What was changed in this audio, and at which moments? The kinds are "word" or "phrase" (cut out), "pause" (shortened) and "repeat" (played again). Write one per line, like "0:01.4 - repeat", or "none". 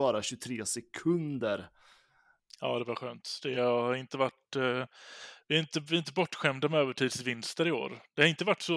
none